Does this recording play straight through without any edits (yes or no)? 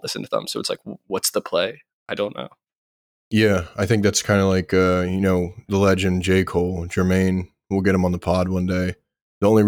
yes